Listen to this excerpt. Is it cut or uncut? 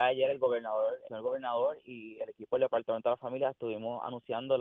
cut